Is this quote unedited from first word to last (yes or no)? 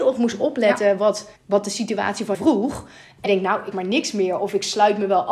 no